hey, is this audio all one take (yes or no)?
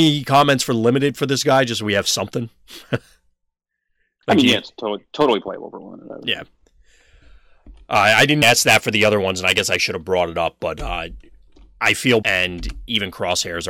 no